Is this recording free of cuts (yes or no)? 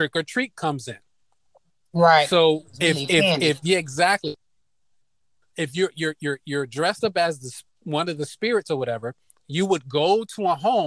yes